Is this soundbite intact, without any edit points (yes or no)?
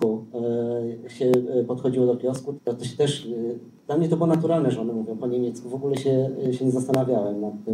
no